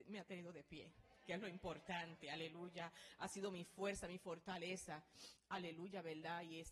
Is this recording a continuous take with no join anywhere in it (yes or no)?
yes